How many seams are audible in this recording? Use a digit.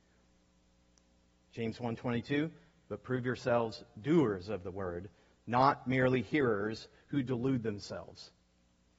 0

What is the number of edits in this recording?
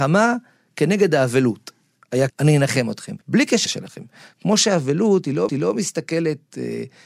4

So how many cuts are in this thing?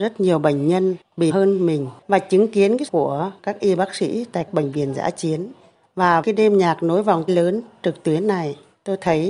6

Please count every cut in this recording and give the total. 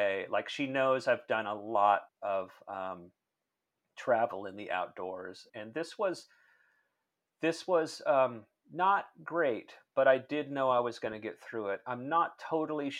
2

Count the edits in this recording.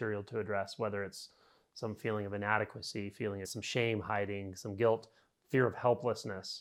1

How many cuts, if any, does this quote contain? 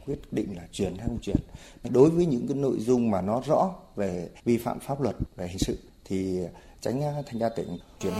0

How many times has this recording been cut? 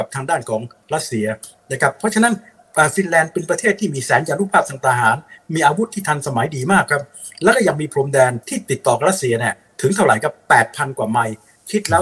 1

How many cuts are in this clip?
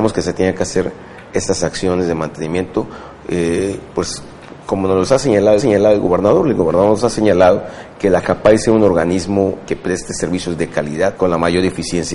3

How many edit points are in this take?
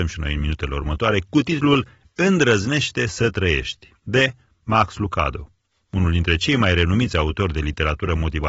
0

